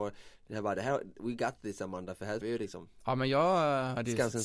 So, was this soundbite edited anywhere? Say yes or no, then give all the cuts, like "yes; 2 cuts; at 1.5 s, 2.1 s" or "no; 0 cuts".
yes; 1 cut; at 2.4 s